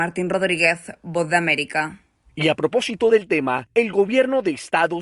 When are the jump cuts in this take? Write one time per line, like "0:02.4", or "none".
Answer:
none